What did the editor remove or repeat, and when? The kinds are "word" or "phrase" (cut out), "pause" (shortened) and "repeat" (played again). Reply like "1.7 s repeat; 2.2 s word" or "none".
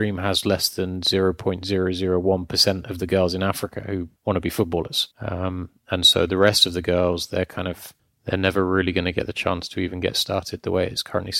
4.2 s pause; 5.1 s pause; 8.0 s pause

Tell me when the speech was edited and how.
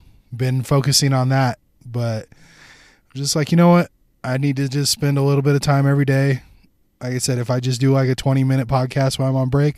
none

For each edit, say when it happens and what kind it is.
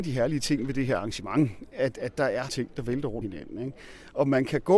2.5 s phrase; 3.2 s phrase

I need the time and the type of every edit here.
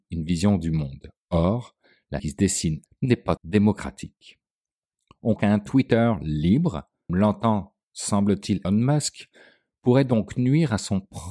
2.2 s word; 2.9 s word; 3.4 s word; 5.4 s word; 7.1 s word; 8.6 s word

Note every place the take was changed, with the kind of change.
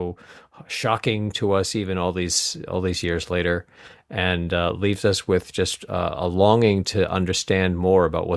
none

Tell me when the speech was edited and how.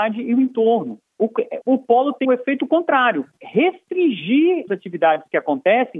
1.6 s word; 2.2 s word; 3.4 s word; 4.7 s word

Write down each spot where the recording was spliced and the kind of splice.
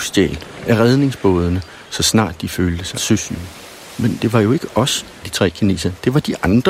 2.9 s word; 4.2 s word; 5.2 s word

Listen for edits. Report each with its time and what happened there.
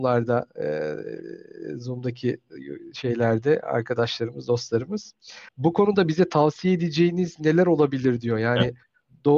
5.5 s pause

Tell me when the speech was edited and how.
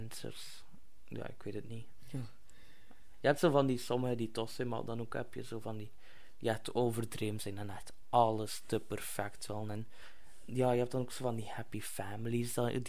none

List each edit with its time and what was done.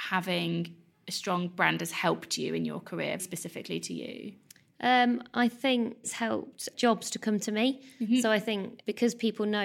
3.2 s word; 6.0 s word

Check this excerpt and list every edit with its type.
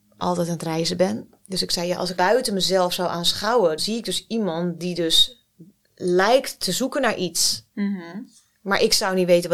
2.2 s word; 3.8 s word

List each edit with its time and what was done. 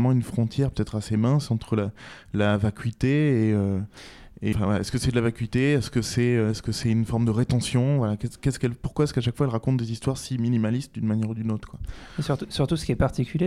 4.5 s word

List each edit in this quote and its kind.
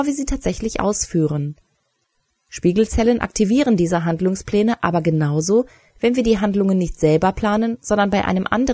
none

